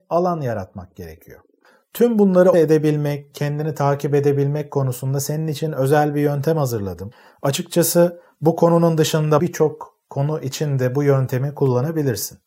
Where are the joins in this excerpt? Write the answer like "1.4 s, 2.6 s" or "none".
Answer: 2.5 s, 3.3 s, 9.4 s